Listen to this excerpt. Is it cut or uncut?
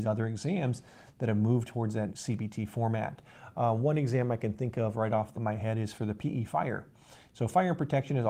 cut